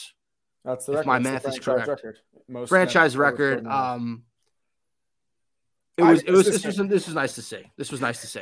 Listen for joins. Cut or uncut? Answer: uncut